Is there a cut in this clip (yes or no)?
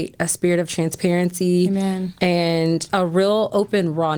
yes